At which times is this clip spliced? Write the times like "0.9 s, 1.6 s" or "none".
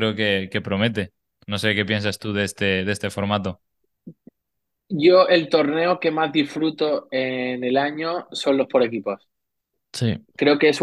none